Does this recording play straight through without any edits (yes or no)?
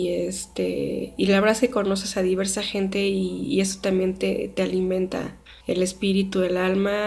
no